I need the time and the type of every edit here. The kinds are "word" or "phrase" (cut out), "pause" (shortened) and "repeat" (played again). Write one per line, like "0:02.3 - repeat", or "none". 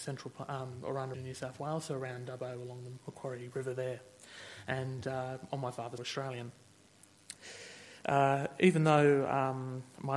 0:01.1 - word
0:06.0 - phrase